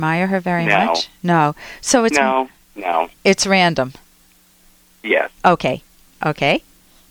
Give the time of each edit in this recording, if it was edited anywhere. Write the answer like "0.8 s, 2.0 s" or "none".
5.3 s

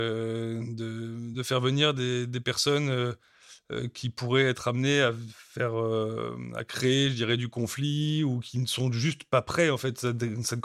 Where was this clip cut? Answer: none

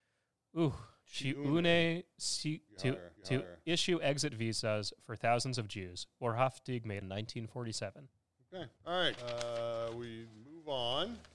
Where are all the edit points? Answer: 1.0 s, 2.7 s, 3.2 s, 7.0 s, 8.8 s, 9.2 s

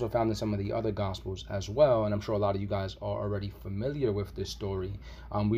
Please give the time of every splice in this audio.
none

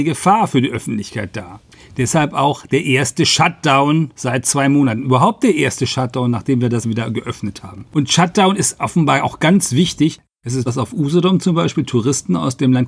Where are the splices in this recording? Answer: 6.8 s, 10.7 s

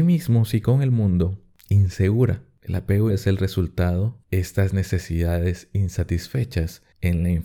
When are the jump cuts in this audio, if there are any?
3.1 s, 4.2 s

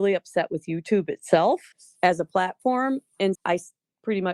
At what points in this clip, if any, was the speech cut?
1.7 s, 3.3 s

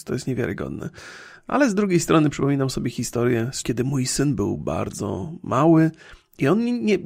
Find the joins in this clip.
3.6 s

